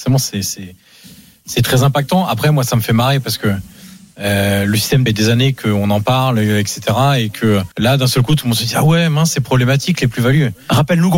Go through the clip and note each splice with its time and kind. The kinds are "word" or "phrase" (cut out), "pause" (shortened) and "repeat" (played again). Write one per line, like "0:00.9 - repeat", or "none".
0:05.1 - phrase
0:07.7 - pause